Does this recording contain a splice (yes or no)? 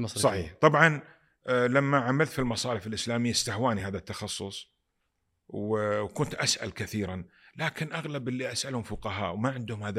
no